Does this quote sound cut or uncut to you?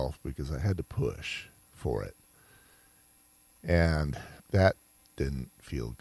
cut